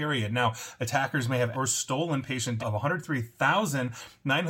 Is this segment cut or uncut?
cut